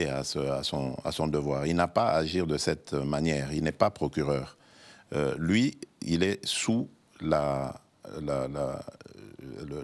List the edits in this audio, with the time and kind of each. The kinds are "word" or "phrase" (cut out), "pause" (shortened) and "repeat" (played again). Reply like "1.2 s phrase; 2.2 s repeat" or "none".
none